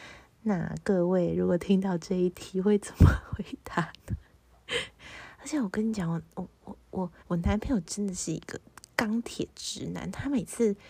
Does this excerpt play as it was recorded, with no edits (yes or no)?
no